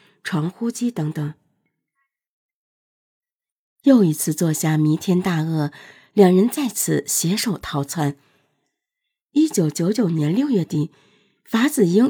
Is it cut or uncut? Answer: uncut